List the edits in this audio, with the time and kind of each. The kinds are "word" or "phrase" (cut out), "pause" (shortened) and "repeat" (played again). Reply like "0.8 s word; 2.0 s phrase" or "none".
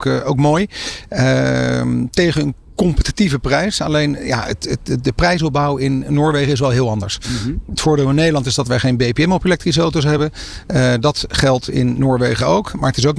none